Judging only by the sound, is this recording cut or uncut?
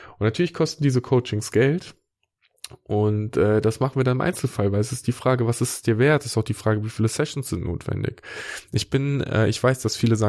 uncut